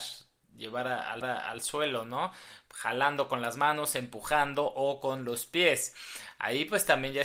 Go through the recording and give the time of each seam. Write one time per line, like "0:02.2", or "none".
0:01.2